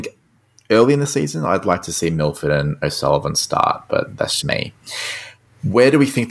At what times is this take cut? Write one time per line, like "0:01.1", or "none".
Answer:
0:04.4